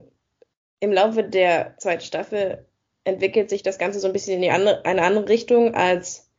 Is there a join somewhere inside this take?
no; 0 cuts

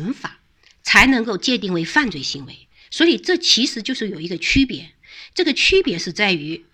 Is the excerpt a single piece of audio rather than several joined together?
yes; 0 cuts

